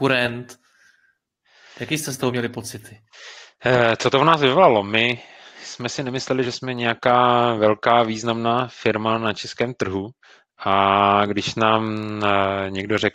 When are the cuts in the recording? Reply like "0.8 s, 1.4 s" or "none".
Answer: none